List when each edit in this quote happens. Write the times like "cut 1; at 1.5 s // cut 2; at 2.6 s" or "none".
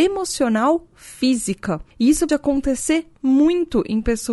cut 1; at 0.9 s // cut 2; at 1.9 s // cut 3; at 2.3 s

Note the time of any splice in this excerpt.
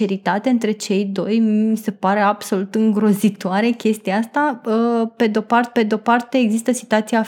cut 1; at 5.8 s

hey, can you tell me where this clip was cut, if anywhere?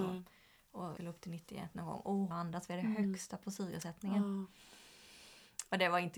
cut 1; at 1.0 s // cut 2; at 2.3 s

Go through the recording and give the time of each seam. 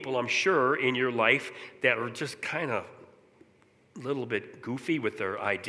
none

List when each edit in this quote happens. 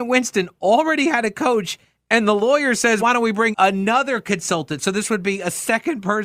cut 1; at 3.0 s // cut 2; at 3.5 s

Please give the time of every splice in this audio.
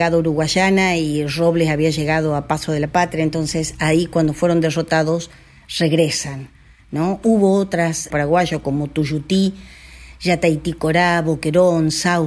cut 1; at 8.1 s

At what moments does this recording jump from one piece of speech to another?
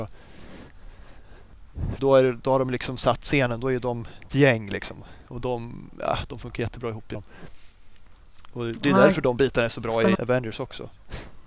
cut 1; at 2.0 s // cut 2; at 4.3 s // cut 3; at 7.1 s // cut 4; at 10.1 s

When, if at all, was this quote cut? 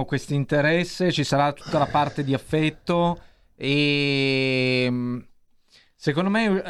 none

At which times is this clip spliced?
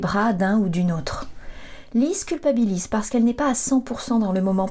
none

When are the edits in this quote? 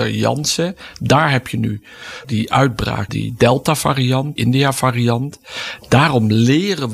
cut 1; at 2.2 s // cut 2; at 3.1 s // cut 3; at 4.4 s

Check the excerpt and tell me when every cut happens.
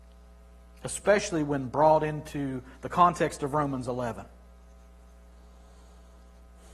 none

